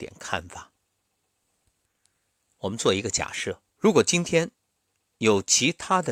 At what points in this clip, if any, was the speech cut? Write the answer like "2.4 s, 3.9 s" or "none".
3.7 s, 4.8 s